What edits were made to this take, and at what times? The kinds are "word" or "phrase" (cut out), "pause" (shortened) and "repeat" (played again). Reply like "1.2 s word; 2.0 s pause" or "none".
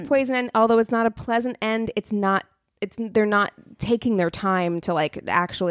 none